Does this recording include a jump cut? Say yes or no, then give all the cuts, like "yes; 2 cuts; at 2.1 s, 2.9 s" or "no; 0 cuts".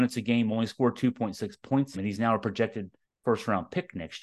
yes; 2 cuts; at 1.9 s, 3.0 s